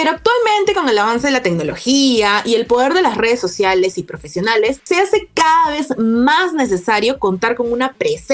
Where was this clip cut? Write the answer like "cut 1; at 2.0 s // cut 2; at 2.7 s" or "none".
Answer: none